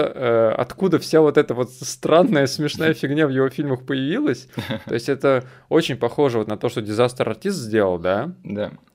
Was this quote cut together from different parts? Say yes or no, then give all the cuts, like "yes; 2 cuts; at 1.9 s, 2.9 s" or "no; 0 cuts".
no; 0 cuts